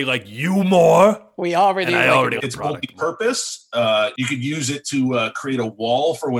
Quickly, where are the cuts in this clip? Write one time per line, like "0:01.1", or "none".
0:02.4